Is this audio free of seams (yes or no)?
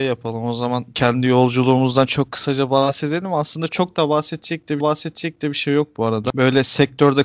no